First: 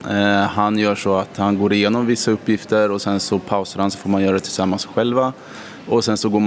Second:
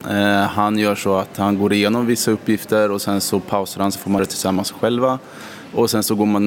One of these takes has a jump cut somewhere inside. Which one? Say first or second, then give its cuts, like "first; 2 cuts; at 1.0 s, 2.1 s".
second; 1 cut; at 4.2 s